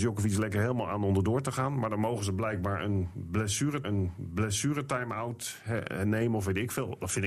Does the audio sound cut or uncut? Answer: cut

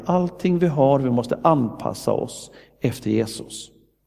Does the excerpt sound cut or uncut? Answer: uncut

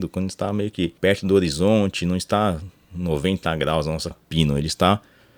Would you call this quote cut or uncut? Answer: cut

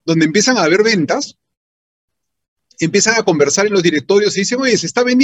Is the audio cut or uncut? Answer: uncut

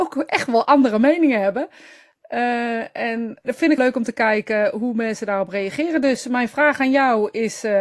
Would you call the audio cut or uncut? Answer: cut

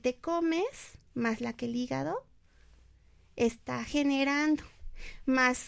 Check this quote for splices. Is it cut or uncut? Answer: cut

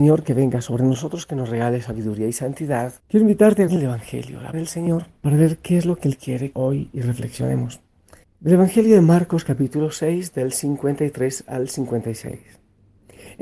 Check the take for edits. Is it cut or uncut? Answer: cut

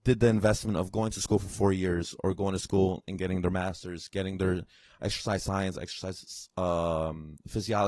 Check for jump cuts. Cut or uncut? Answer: uncut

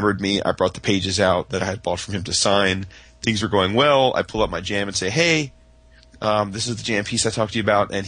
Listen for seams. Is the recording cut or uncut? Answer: uncut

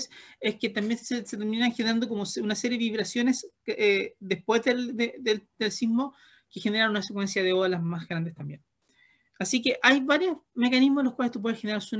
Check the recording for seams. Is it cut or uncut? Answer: uncut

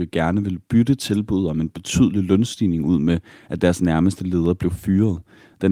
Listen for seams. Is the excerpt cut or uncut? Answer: uncut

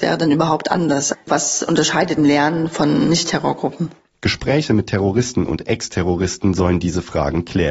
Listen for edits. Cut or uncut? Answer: cut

